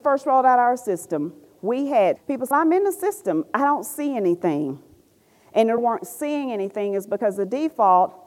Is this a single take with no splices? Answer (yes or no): no